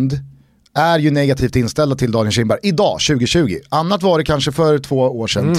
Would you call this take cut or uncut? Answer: uncut